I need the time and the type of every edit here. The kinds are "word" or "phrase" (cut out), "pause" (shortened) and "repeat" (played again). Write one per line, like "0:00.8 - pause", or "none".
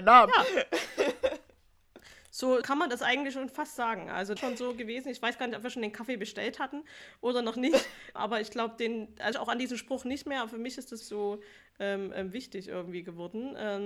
0:02.6 - word
0:04.4 - phrase
0:08.2 - word
0:09.3 - phrase
0:11.0 - word